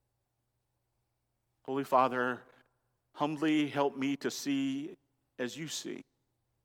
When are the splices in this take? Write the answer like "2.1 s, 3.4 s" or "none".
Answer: none

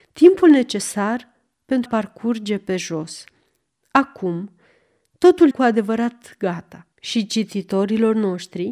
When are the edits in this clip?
1.9 s, 5.5 s, 6.9 s

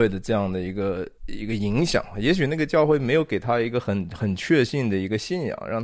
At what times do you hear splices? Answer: 1.2 s

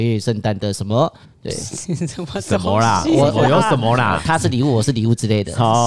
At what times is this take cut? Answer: 1.2 s

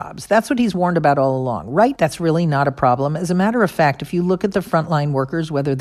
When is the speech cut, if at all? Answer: 2.0 s

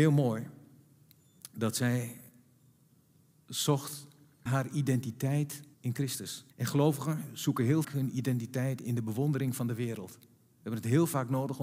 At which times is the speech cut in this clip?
4.5 s, 5.7 s, 6.5 s, 7.8 s

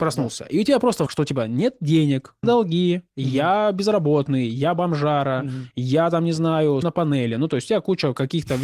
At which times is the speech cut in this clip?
1.1 s, 2.4 s, 6.8 s

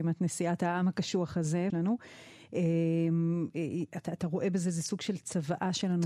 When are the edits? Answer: 1.7 s

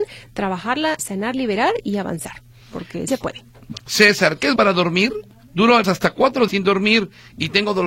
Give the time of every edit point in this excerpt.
1.0 s, 3.1 s, 4.6 s, 5.8 s, 6.5 s

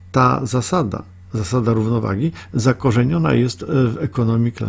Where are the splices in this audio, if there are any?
none

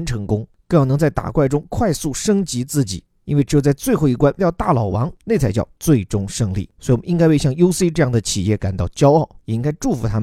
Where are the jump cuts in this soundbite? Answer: 4.4 s

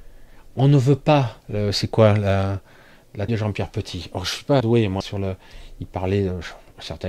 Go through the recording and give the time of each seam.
1.4 s, 3.3 s, 4.6 s, 5.0 s

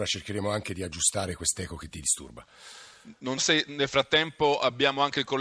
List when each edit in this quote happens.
3.4 s

